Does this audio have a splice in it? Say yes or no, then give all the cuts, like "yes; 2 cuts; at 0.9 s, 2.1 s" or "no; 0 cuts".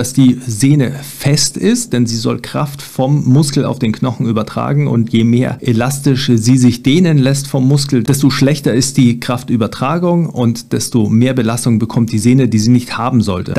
no; 0 cuts